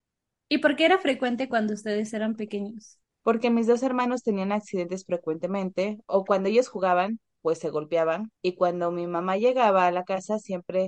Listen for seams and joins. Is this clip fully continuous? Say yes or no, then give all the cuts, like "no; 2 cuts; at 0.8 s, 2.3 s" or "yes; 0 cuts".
no; 3 cuts; at 3.0 s, 6.0 s, 8.4 s